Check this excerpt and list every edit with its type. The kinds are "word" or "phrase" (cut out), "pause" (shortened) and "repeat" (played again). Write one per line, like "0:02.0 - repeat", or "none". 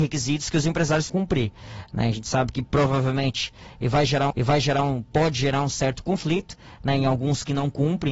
0:01.1 - word
0:04.3 - repeat